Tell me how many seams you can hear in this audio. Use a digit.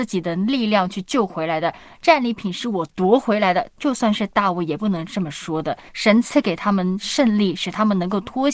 1